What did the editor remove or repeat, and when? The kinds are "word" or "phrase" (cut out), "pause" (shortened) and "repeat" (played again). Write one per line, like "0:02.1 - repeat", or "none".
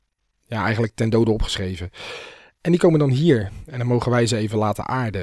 none